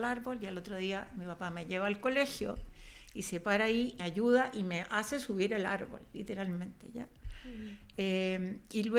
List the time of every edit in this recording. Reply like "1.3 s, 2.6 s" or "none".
4.0 s